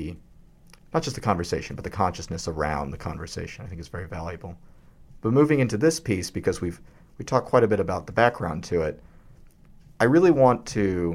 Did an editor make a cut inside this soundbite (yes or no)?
no